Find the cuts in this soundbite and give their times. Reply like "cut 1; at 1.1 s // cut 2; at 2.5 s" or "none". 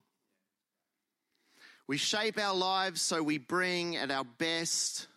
none